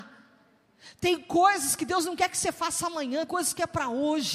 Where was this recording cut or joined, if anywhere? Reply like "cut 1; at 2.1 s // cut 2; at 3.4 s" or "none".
cut 1; at 3.3 s